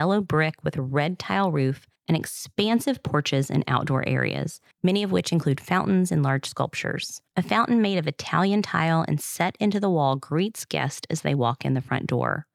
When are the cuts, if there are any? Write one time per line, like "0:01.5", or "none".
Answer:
0:02.0
0:04.7
0:07.3